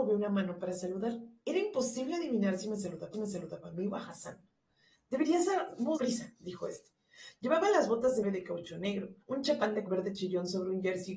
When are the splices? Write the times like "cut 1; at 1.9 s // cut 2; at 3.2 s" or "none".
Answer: cut 1; at 3.1 s // cut 2; at 6.0 s // cut 3; at 8.2 s // cut 4; at 9.2 s // cut 5; at 9.9 s